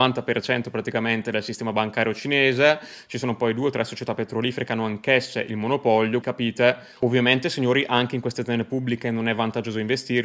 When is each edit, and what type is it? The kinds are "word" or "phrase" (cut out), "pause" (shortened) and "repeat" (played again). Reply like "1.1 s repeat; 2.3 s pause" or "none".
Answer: 6.2 s word